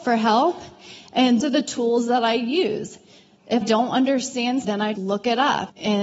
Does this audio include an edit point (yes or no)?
yes